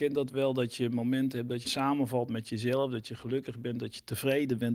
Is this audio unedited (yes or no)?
no